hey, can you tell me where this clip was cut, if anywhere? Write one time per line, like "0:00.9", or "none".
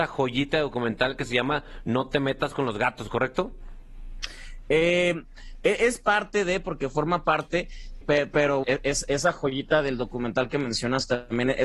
0:08.0
0:08.6